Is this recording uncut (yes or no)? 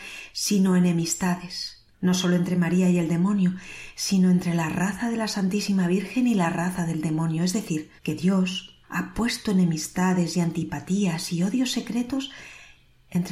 no